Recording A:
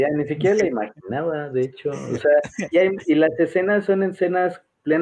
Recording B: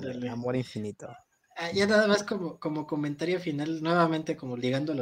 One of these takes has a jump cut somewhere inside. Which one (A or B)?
A